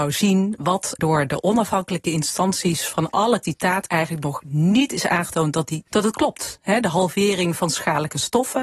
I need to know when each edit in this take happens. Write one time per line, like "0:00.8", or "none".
0:01.0
0:03.4
0:03.9
0:05.9